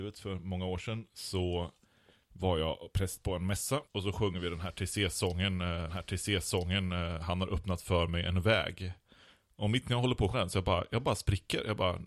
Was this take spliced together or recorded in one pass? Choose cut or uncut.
cut